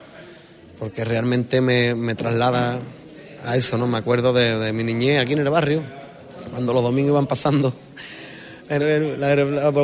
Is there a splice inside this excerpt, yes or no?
no